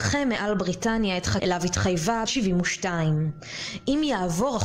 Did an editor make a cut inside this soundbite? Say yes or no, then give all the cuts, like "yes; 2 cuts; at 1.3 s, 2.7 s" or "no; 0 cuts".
yes; 2 cuts; at 1.4 s, 2.3 s